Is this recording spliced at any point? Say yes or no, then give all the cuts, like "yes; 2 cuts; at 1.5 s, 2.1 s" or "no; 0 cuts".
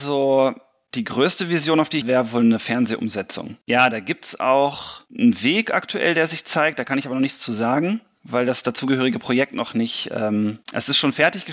yes; 4 cuts; at 2.0 s, 3.6 s, 5.1 s, 10.6 s